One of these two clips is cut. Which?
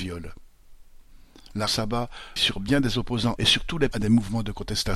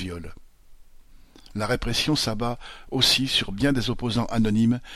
first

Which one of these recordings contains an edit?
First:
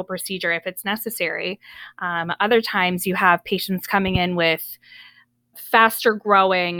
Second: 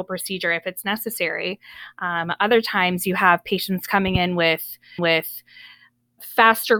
second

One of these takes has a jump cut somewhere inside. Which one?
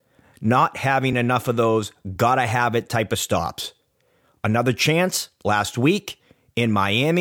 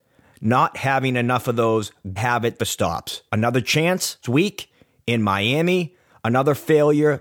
second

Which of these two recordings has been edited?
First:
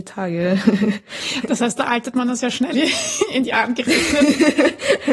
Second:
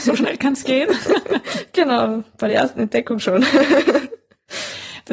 first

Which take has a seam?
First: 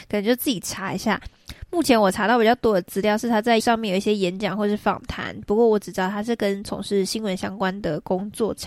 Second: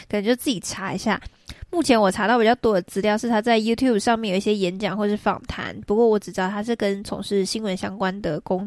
first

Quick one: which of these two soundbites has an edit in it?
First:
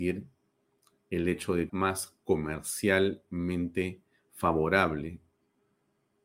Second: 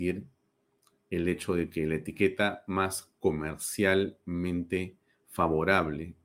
first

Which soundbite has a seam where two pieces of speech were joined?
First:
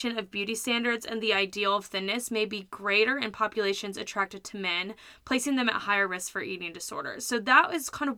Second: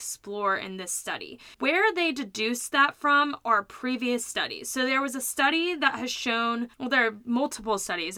second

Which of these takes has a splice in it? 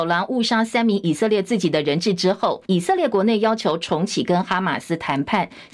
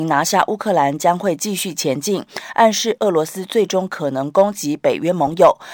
first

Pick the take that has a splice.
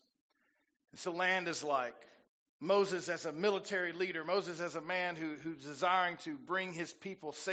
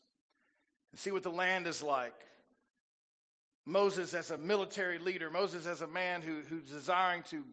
first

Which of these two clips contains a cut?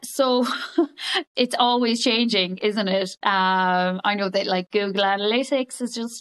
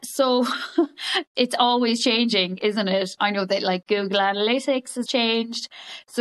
second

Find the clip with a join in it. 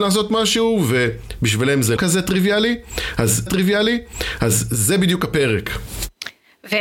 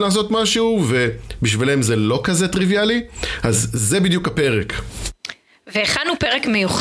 first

